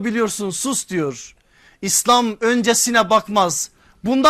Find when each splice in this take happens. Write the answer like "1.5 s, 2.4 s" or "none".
none